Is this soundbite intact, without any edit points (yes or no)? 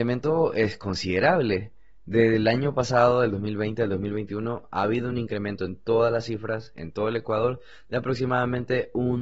yes